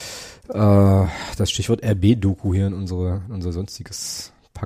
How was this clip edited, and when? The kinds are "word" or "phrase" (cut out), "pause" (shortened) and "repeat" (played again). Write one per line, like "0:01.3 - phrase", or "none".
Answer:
none

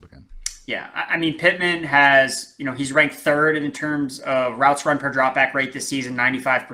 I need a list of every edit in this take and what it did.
none

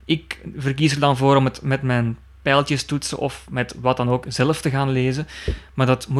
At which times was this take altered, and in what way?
none

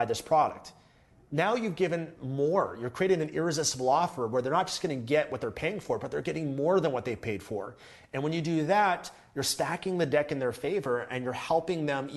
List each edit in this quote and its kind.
none

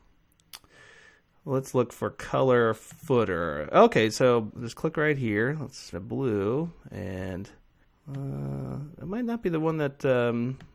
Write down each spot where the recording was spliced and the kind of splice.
0:04.5 - word
0:05.9 - word
0:07.8 - pause

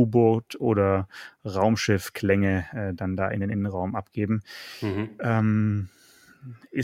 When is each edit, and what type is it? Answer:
none

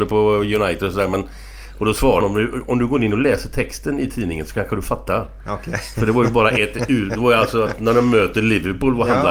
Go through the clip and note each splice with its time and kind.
0:02.2 - word

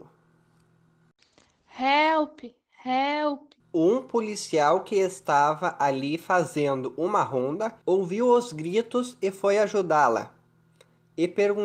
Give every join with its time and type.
0:03.6 - pause
0:07.8 - pause

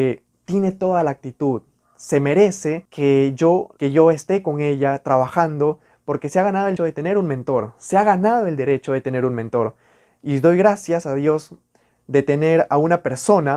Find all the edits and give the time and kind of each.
0:06.8 - word

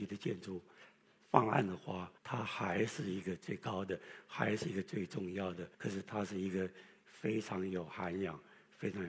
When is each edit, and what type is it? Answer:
0:02.2 - pause
0:05.7 - pause

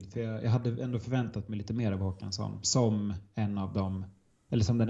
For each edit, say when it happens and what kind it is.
none

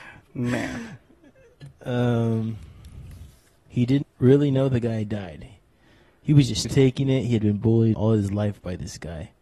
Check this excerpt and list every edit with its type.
0:04.0 - word
0:06.6 - word
0:07.9 - word

